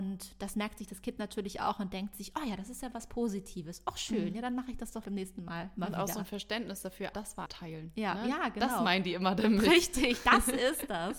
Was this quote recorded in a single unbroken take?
no; 3 cuts; at 5.0 s, 7.1 s, 7.5 s

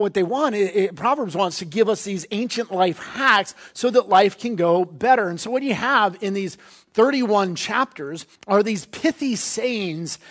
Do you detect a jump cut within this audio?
yes; 1 cut; at 8.4 s

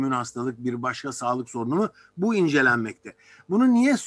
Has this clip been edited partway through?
no; 0 cuts

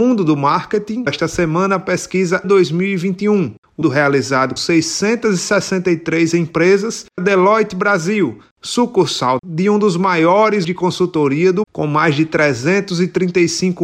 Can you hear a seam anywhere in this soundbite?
yes; 8 cuts; at 1.1 s, 2.4 s, 3.8 s, 4.6 s, 7.2 s, 9.4 s, 10.6 s, 11.6 s

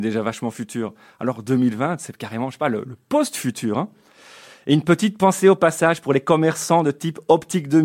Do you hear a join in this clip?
no; 0 cuts

